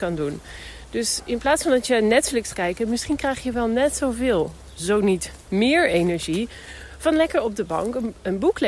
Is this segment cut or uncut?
cut